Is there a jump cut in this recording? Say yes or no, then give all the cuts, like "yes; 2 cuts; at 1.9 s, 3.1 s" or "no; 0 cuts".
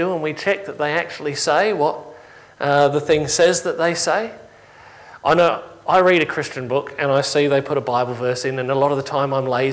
no; 0 cuts